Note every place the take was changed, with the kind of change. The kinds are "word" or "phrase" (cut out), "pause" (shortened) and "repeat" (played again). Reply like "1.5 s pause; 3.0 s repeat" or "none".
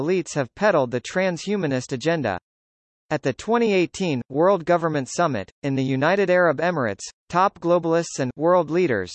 none